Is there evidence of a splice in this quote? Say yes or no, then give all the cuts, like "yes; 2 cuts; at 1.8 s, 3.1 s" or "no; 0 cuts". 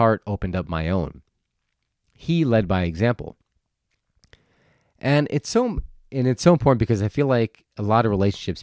no; 0 cuts